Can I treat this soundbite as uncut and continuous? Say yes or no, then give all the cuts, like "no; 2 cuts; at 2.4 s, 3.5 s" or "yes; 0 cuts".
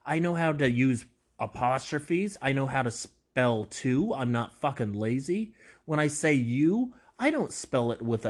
yes; 0 cuts